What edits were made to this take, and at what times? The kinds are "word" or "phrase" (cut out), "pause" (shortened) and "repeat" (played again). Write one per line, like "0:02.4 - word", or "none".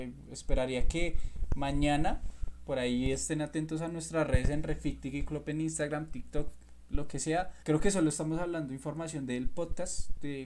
0:07.6 - pause